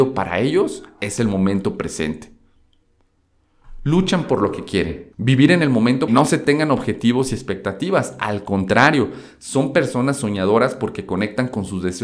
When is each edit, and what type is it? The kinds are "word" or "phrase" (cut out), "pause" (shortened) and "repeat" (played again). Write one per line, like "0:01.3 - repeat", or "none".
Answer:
0:05.1 - pause
0:06.1 - phrase